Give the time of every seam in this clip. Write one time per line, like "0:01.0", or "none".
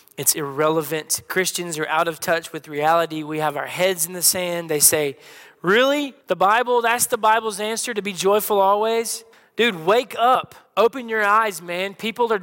0:06.2
0:09.3
0:10.7